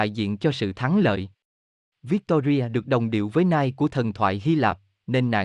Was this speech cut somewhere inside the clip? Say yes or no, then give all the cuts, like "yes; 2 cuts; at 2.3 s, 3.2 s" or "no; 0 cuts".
no; 0 cuts